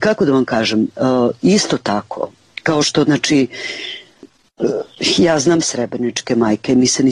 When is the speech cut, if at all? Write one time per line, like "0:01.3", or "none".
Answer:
0:05.6